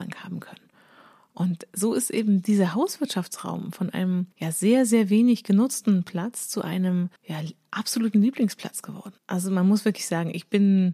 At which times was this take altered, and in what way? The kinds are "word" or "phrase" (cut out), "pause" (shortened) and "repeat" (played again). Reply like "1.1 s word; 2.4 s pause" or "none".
4.3 s pause; 7.2 s pause; 9.2 s pause